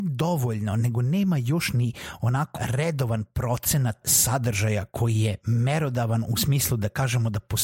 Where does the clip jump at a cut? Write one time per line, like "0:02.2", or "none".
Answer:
0:02.6
0:04.0